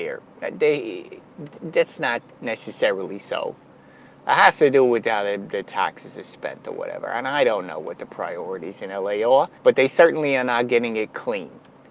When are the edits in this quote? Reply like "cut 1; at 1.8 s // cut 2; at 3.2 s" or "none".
cut 1; at 9.6 s